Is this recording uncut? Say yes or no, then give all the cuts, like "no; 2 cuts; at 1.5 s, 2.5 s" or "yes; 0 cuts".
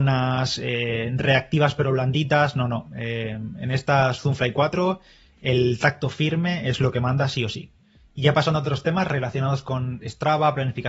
yes; 0 cuts